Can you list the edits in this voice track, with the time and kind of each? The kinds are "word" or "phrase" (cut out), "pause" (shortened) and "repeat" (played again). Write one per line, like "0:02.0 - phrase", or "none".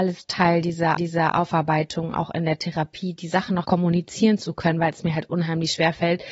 0:01.0 - repeat
0:03.6 - word